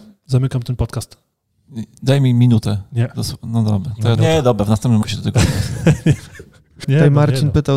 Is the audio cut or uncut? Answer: cut